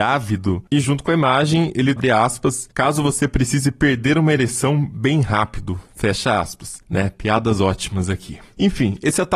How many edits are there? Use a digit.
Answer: 1